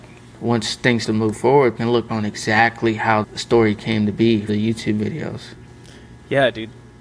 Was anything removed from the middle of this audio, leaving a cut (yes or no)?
yes